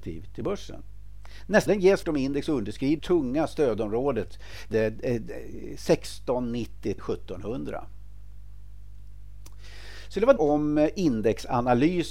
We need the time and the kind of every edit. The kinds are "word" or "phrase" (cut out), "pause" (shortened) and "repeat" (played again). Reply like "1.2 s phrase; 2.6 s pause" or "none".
1.7 s word; 2.0 s word; 3.0 s word; 4.7 s word; 7.0 s word; 10.4 s word